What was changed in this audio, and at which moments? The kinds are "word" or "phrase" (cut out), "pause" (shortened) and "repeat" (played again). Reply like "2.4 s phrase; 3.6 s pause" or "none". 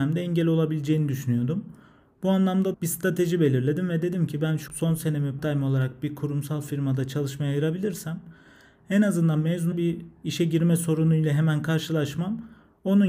2.7 s word; 4.7 s word; 5.4 s word; 9.7 s word